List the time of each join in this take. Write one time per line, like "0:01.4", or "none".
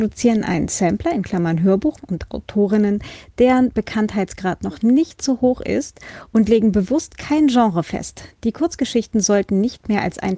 0:02.0